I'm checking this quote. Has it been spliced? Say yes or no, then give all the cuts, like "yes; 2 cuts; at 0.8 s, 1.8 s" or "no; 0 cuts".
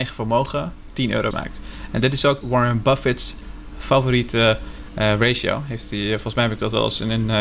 yes; 2 cuts; at 1.3 s, 2.4 s